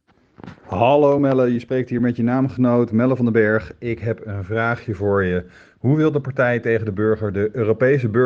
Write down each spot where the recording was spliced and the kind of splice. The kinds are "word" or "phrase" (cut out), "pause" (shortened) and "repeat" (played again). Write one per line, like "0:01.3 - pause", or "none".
none